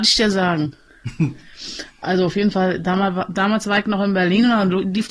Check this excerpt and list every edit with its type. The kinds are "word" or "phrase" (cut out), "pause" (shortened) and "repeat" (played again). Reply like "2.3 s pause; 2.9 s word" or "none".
none